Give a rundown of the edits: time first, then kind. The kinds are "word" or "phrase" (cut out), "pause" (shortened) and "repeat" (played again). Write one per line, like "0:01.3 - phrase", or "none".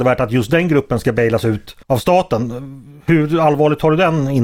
0:01.8 - pause